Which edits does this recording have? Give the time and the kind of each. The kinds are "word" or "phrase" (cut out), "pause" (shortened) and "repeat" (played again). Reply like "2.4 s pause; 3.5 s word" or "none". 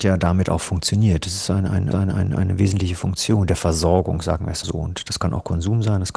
1.9 s repeat; 4.6 s word